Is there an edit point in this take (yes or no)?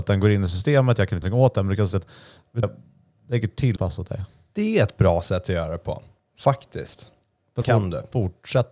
yes